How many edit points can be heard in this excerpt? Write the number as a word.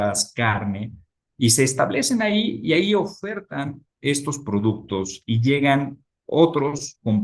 zero